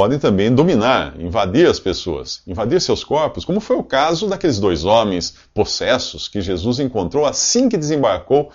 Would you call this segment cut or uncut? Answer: uncut